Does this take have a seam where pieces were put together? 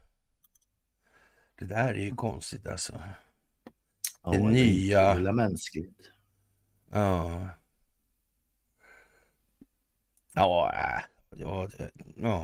no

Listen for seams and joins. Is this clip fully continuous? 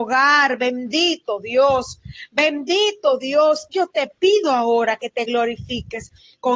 yes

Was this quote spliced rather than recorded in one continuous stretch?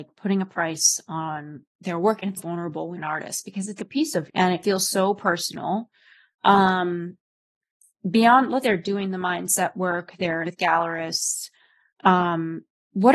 yes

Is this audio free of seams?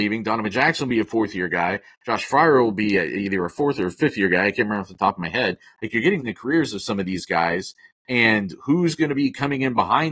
no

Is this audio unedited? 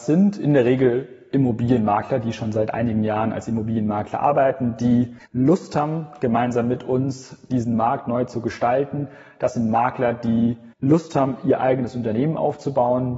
no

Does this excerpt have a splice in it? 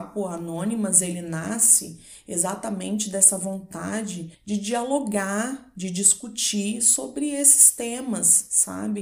yes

